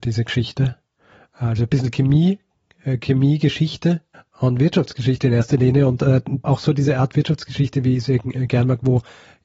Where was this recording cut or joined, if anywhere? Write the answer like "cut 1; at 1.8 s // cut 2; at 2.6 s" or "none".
cut 1; at 4.1 s // cut 2; at 6.4 s